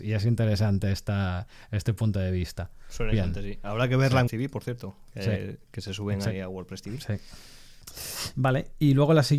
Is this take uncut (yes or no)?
no